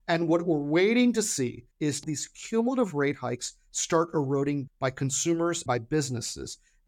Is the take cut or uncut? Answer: cut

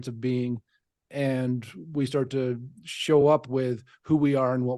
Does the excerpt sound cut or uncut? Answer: uncut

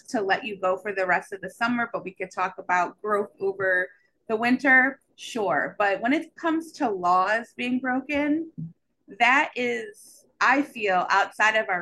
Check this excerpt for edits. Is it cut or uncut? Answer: uncut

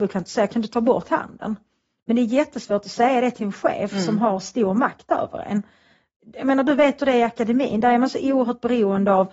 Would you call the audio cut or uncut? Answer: uncut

